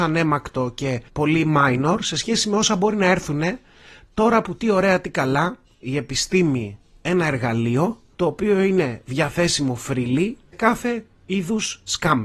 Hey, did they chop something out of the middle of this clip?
yes; 2 cuts; at 5.8 s, 10.5 s

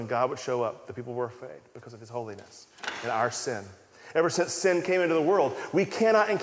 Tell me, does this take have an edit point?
no; 0 cuts

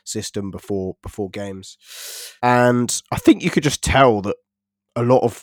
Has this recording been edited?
yes; 1 cut; at 2.4 s

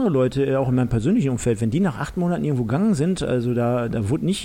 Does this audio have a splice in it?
no; 0 cuts

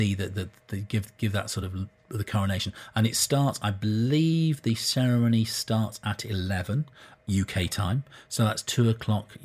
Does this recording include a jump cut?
no; 0 cuts

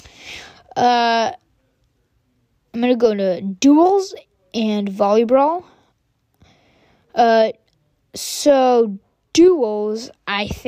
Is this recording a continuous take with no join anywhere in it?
yes; 0 cuts

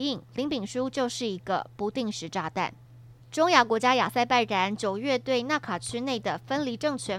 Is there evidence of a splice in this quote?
yes; 1 cut; at 3.2 s

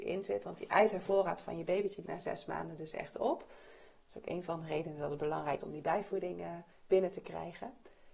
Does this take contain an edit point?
yes; 3 cuts; at 2.1 s, 5.6 s, 6.7 s

